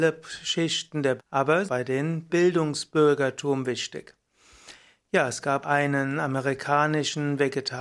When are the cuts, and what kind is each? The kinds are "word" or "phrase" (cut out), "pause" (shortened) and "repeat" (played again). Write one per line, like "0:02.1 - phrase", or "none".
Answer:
0:01.2 - word
0:01.7 - phrase
0:02.3 - word
0:05.6 - word